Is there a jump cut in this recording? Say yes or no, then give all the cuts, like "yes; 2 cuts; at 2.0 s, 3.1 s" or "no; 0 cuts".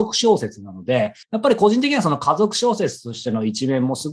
yes; 1 cut; at 1.2 s